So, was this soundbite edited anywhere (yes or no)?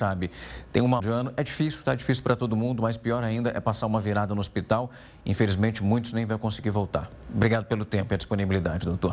yes